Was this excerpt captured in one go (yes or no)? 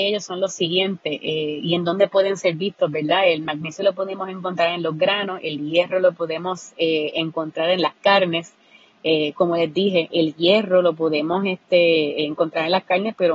yes